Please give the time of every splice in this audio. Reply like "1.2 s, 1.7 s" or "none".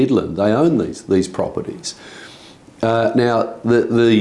none